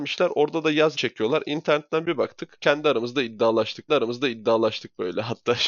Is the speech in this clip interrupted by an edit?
yes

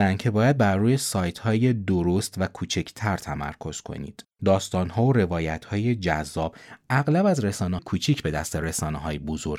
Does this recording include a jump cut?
yes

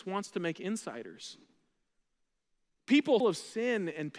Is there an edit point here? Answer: yes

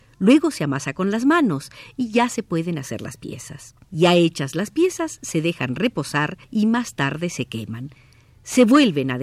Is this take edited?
yes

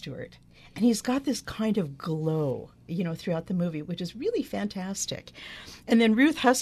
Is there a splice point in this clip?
no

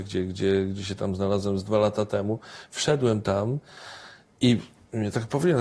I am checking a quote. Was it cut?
no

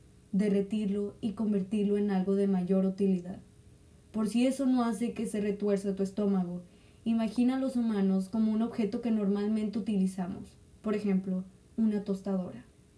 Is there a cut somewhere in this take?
no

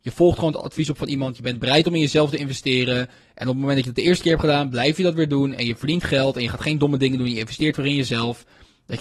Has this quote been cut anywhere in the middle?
no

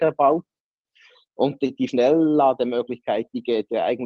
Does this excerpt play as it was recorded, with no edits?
no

